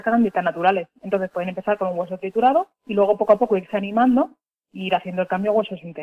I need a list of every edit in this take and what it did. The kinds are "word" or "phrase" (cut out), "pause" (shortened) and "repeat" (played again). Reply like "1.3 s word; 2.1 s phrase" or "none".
2.7 s pause